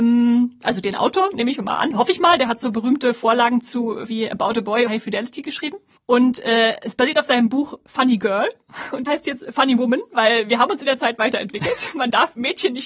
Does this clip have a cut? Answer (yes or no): yes